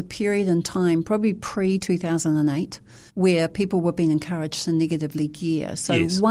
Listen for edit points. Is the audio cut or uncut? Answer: cut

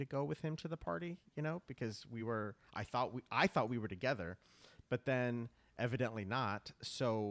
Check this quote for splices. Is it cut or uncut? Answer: uncut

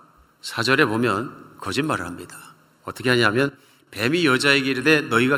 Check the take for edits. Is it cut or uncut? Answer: uncut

